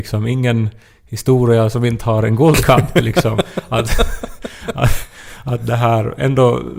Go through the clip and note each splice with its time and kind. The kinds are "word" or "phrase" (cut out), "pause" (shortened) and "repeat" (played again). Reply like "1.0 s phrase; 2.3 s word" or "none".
none